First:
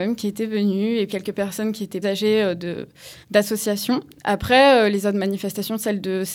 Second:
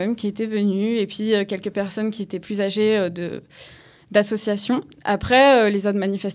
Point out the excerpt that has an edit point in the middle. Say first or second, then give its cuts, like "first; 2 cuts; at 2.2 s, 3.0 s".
first; 3 cuts; at 1.1 s, 2.0 s, 3.2 s